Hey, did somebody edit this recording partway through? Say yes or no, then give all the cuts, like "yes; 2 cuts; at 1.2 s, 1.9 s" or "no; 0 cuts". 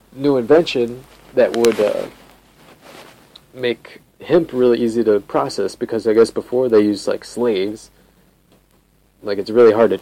no; 0 cuts